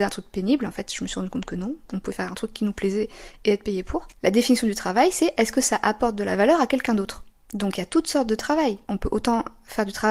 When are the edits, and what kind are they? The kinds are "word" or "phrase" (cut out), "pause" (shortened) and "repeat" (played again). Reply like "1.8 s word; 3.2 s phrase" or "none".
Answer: none